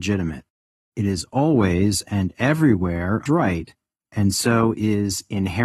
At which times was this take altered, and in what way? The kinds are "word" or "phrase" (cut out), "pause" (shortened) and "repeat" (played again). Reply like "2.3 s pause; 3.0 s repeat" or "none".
3.3 s phrase